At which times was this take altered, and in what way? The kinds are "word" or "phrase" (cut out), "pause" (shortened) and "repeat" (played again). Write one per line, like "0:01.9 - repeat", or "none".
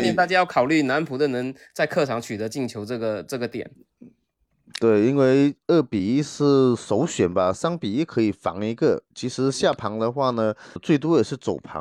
0:10.8 - word